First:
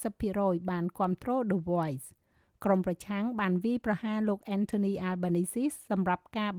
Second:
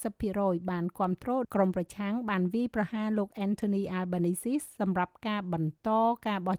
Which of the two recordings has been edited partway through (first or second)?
second